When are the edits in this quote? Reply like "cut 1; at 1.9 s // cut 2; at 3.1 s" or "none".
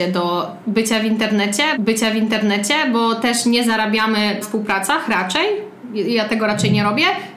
cut 1; at 1.7 s // cut 2; at 4.4 s